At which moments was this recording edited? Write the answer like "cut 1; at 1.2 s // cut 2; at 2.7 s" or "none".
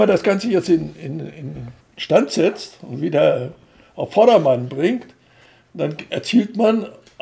cut 1; at 1.8 s